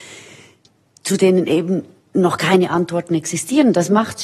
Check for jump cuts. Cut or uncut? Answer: uncut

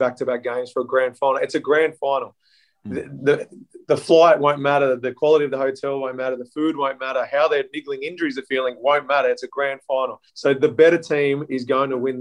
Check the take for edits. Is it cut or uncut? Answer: cut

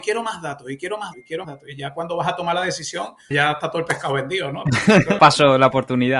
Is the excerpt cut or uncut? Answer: cut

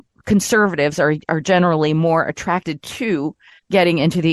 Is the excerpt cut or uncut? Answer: uncut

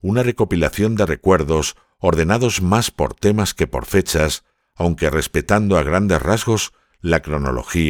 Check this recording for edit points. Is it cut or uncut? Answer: uncut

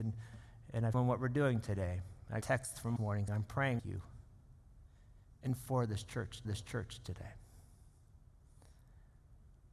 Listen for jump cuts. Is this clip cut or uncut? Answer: cut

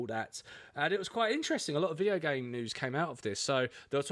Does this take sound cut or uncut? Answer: uncut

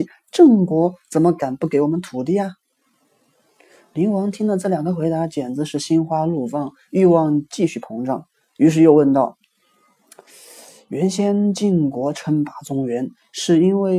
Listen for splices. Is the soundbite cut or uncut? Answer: uncut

